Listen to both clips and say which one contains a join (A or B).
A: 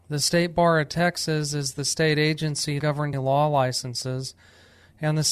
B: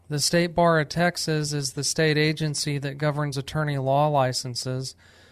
A